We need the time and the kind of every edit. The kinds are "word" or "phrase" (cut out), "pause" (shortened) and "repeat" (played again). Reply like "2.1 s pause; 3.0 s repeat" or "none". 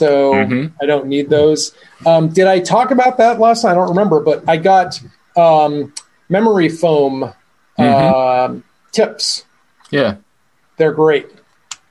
none